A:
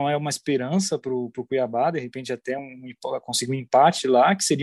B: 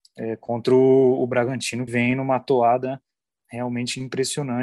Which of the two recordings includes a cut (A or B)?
B